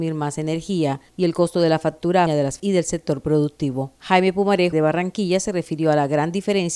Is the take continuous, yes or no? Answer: no